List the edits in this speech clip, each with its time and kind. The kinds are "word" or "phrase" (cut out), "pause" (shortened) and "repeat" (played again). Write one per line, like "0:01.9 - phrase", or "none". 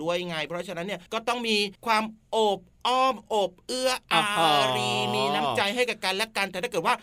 0:01.1 - pause
0:01.8 - pause